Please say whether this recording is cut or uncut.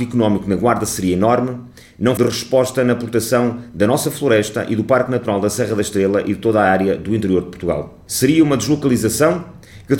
cut